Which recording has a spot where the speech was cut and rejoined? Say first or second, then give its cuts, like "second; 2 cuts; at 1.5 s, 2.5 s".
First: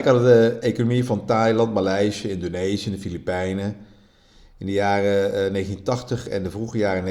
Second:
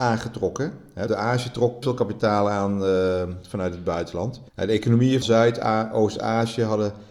second; 4 cuts; at 1.1 s, 1.8 s, 4.5 s, 5.2 s